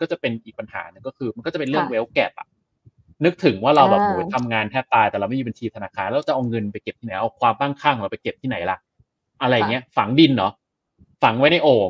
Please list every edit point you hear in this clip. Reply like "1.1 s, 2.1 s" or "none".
none

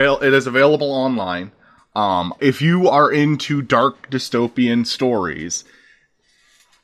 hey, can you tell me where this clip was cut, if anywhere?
2.4 s

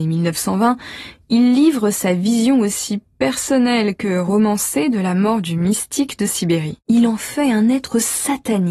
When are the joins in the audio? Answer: 6.8 s

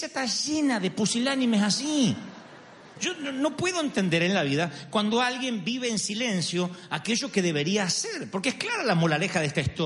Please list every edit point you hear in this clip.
none

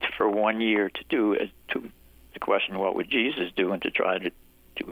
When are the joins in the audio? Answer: 2.3 s

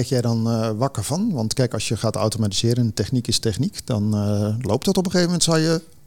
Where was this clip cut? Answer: none

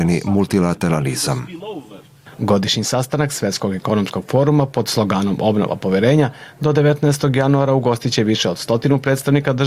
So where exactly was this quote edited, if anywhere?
2.3 s

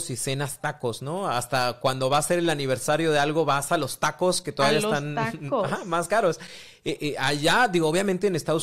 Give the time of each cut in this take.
none

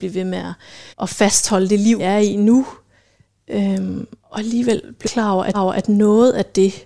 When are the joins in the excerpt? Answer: 0.9 s, 2.0 s, 4.2 s, 5.0 s, 5.5 s

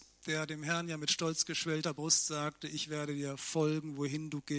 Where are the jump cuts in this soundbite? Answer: none

